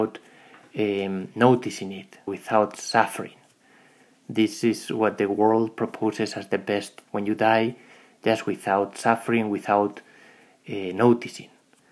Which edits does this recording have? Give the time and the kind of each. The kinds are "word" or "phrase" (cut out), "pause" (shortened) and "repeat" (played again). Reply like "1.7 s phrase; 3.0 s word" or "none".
2.3 s word; 7.0 s word